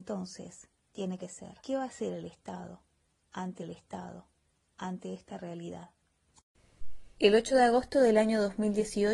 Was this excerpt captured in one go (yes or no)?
no